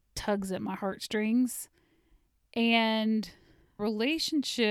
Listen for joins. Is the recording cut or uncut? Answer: cut